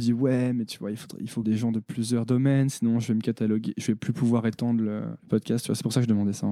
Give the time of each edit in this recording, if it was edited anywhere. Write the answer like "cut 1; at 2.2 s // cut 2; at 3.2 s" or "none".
cut 1; at 1.4 s // cut 2; at 5.2 s